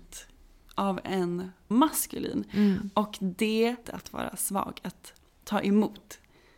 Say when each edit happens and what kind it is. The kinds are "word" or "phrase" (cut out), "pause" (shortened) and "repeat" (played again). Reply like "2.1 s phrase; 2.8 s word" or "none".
1.7 s word; 3.8 s phrase